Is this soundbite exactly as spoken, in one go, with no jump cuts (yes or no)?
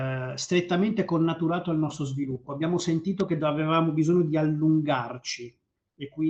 yes